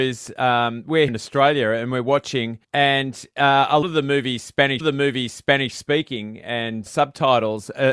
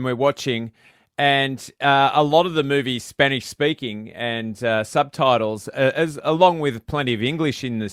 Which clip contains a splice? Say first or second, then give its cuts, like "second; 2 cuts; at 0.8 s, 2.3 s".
first; 5 cuts; at 1.1 s, 2.6 s, 3.8 s, 4.8 s, 6.9 s